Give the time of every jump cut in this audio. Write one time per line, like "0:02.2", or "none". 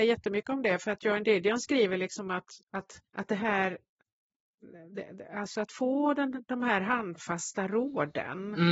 0:03.1